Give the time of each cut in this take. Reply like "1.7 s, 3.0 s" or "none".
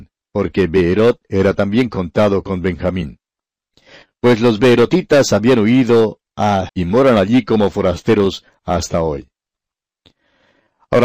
6.7 s